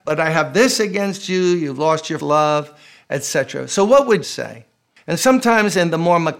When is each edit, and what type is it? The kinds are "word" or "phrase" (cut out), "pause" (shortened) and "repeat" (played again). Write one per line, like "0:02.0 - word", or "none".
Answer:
0:02.2 - word
0:04.2 - word